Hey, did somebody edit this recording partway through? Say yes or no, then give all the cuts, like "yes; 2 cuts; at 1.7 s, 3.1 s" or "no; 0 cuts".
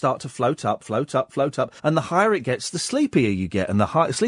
yes; 1 cut; at 1.8 s